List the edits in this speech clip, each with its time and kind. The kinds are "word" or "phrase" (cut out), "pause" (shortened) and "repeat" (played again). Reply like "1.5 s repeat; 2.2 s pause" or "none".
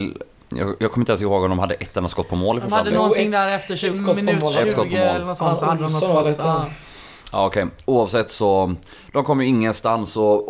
3.9 s word